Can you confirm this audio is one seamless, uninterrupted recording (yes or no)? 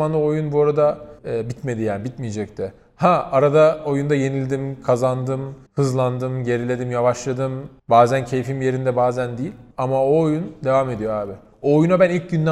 no